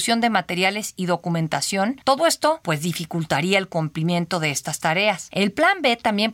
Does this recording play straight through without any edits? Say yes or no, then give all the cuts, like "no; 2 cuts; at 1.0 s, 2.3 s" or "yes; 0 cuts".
yes; 0 cuts